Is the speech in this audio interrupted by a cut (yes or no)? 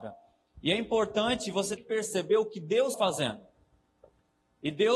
yes